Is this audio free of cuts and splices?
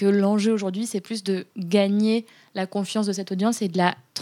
no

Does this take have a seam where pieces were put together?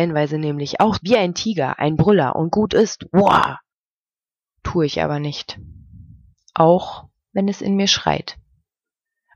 yes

